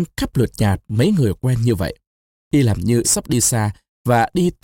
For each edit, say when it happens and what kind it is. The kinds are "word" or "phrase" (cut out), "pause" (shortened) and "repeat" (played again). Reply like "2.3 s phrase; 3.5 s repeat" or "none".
3.0 s word